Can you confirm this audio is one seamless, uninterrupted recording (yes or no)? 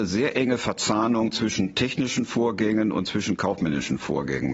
yes